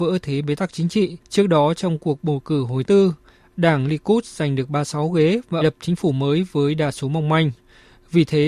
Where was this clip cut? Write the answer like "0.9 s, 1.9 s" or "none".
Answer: 1.2 s, 2.8 s, 5.6 s